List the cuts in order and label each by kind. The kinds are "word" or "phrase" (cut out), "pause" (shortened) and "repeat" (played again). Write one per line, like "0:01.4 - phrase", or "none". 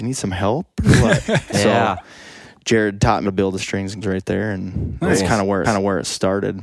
0:03.2 - word
0:03.6 - word
0:04.0 - word
0:05.6 - repeat